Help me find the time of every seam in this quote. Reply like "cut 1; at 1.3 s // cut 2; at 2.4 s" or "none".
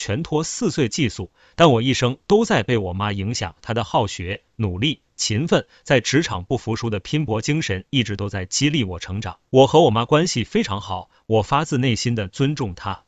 cut 1; at 9.5 s